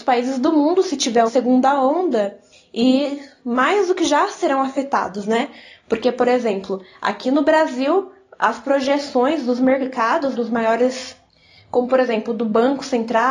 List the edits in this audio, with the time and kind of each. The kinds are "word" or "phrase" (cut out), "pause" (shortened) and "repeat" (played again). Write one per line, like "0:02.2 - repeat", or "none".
0:01.3 - word
0:10.3 - word